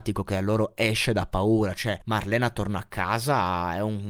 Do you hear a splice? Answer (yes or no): yes